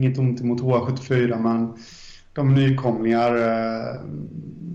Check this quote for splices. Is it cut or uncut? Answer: uncut